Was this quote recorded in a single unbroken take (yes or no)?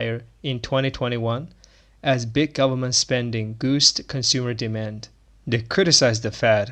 yes